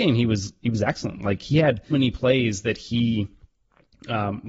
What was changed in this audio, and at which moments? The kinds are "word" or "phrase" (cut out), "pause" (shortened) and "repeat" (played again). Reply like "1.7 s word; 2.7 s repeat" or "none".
1.9 s word